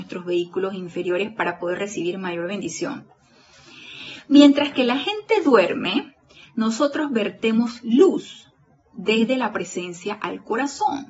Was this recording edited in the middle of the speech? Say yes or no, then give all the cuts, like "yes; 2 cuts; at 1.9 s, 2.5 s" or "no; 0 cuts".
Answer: no; 0 cuts